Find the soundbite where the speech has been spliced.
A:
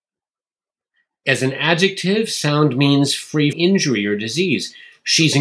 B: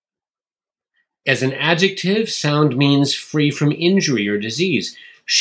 A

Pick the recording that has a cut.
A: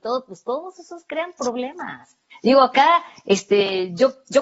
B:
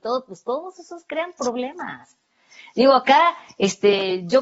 A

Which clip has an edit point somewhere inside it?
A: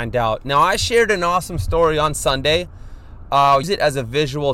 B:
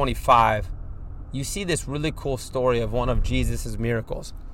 A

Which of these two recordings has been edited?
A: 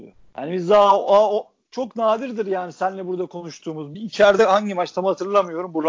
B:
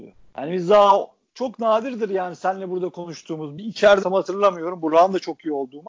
B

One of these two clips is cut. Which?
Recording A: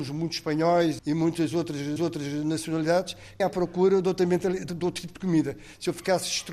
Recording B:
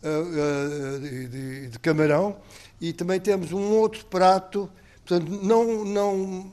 A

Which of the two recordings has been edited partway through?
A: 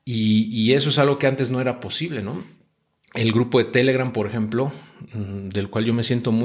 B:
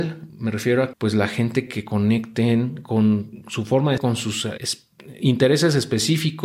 B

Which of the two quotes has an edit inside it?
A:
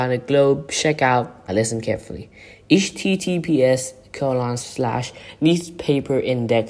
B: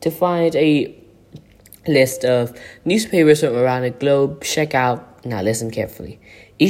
A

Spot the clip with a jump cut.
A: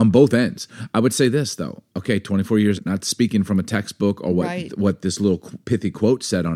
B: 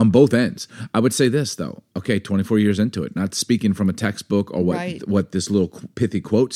A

